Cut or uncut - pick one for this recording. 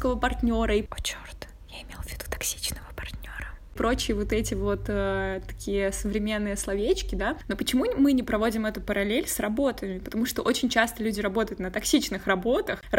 uncut